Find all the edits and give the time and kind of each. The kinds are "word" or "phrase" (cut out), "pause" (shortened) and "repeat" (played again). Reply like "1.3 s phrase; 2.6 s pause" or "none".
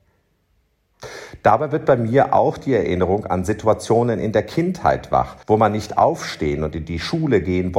5.4 s pause